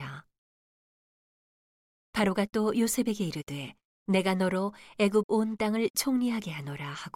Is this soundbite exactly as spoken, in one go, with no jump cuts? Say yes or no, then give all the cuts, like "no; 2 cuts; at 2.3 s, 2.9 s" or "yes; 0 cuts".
no; 1 cut; at 3.9 s